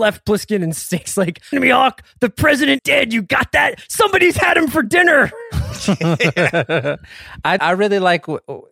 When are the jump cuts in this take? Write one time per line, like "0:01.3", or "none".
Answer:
0:01.5
0:02.8
0:07.6